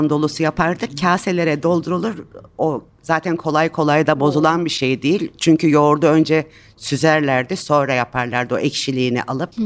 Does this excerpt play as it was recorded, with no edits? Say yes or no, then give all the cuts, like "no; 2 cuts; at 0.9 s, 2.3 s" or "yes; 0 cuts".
yes; 0 cuts